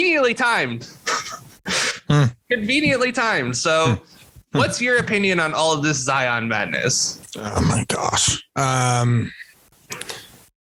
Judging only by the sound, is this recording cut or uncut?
uncut